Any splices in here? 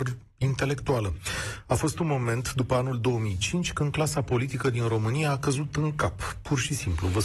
no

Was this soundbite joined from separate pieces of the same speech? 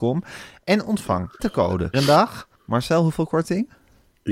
yes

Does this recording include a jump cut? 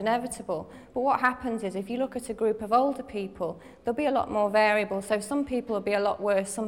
no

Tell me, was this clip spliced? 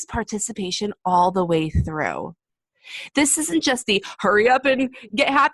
no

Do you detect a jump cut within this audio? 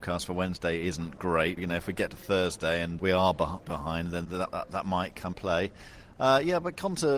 yes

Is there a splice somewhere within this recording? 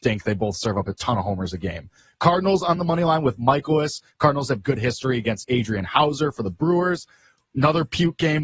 no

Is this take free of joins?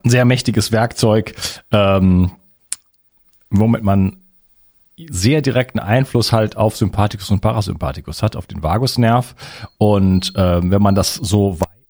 yes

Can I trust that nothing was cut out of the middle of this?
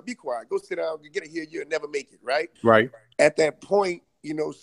no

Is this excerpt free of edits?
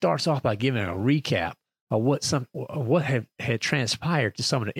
yes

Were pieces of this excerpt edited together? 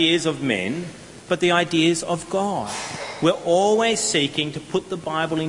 no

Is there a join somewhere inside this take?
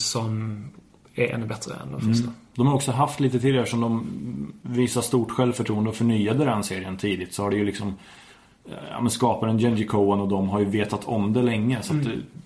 no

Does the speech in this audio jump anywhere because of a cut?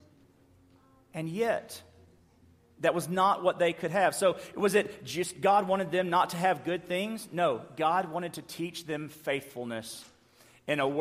no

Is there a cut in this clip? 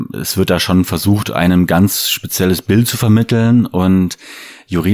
no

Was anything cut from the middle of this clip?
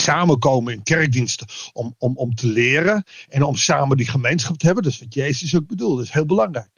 no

